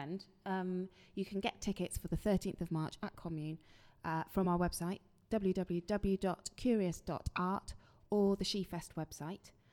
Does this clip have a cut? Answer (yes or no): no